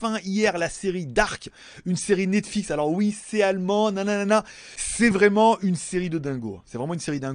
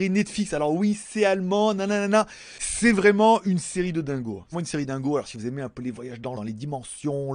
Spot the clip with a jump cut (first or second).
second